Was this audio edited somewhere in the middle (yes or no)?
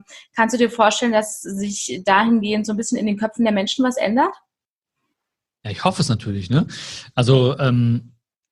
no